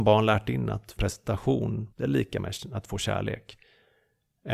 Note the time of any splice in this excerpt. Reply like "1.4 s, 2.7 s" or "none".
1.0 s, 1.9 s